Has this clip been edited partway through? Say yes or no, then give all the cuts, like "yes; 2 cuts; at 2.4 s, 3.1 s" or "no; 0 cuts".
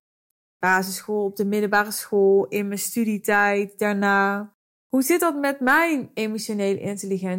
yes; 1 cut; at 4.6 s